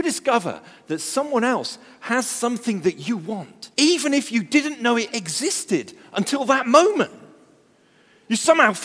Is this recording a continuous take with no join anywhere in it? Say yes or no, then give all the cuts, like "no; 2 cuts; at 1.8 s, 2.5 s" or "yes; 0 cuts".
no; 1 cut; at 3.7 s